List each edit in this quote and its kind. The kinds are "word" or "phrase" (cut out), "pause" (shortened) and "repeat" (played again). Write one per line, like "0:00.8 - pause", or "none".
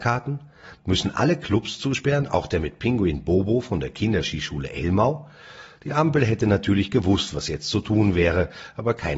none